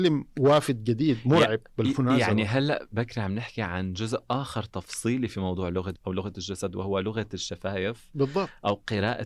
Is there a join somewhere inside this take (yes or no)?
yes